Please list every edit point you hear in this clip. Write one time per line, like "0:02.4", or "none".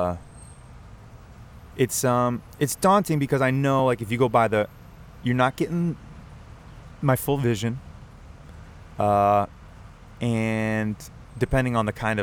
none